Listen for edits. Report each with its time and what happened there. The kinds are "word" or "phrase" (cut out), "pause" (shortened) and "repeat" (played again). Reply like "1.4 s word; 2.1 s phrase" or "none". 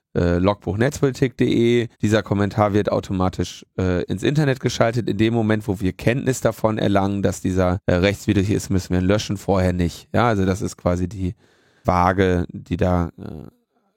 1.9 s pause; 7.8 s word; 11.8 s word